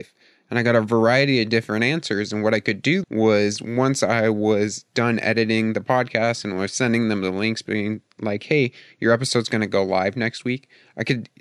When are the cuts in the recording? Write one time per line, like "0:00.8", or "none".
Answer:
0:03.0